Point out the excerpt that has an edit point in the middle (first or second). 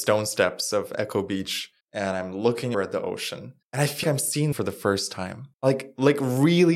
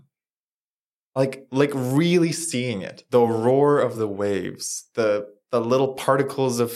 first